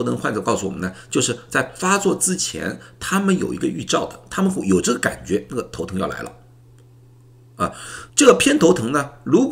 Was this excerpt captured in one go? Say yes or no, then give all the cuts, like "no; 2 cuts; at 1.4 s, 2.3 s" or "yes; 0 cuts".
no; 1 cut; at 8.1 s